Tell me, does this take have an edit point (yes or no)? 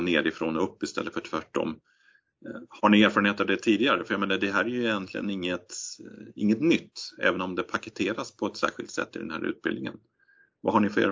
no